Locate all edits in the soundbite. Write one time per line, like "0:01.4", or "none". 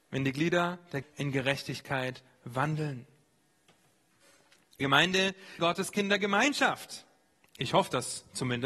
0:01.0
0:04.8
0:05.6